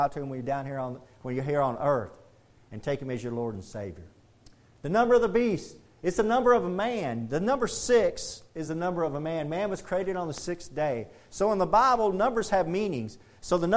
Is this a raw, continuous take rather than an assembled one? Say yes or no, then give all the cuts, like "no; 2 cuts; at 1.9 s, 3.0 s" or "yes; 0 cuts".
yes; 0 cuts